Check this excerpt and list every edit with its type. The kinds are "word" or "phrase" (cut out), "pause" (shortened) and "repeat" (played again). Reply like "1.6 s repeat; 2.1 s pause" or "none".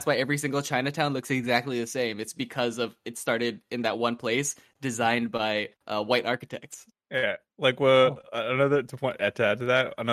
5.7 s pause